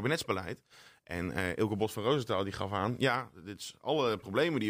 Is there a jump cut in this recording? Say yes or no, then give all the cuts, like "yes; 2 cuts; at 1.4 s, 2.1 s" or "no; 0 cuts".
no; 0 cuts